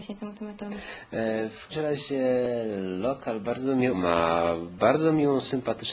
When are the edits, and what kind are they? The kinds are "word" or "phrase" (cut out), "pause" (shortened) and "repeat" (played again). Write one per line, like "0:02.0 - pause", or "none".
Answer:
0:01.7 - word
0:03.9 - word